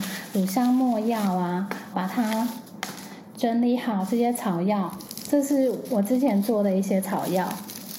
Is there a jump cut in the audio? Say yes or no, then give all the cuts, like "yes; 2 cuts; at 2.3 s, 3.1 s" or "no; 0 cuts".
yes; 1 cut; at 1.9 s